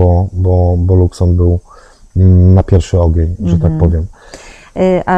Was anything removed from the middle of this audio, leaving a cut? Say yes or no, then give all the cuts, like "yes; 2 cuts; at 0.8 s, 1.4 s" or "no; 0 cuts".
no; 0 cuts